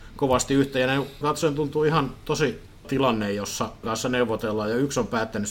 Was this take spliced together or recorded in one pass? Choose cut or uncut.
cut